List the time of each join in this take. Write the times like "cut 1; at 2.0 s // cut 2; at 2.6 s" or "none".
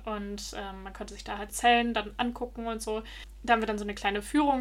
cut 1; at 1.5 s